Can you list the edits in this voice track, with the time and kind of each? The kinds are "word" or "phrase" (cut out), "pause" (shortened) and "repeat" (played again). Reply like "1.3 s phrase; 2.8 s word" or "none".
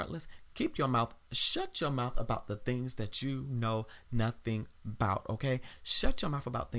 4.8 s word